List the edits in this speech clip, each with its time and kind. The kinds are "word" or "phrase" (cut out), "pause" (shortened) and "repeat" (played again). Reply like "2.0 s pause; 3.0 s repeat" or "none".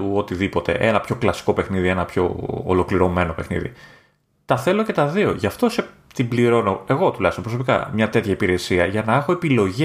none